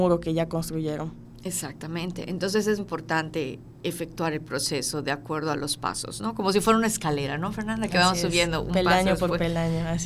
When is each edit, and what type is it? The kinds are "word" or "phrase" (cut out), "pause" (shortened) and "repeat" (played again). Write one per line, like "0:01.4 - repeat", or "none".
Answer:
0:02.8 - word